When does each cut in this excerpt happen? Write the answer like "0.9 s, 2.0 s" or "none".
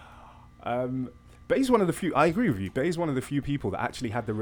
none